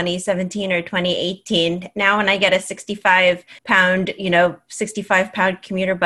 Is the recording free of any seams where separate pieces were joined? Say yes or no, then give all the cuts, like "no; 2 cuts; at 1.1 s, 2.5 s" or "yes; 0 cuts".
no; 1 cut; at 3.6 s